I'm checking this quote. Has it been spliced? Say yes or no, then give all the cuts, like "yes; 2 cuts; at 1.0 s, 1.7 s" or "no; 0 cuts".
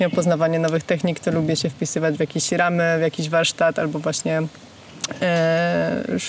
no; 0 cuts